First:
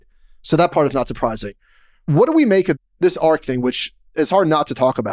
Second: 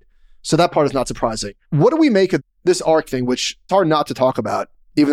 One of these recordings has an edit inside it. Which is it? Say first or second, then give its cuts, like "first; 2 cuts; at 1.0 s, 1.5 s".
second; 2 cuts; at 1.6 s, 3.7 s